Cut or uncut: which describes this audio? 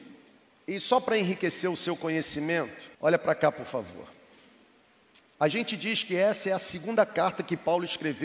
cut